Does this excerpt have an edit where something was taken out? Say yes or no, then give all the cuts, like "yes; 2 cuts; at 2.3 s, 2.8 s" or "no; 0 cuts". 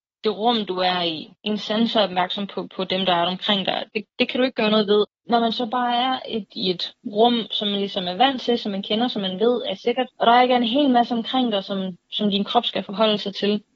yes; 2 cuts; at 1.4 s, 10.1 s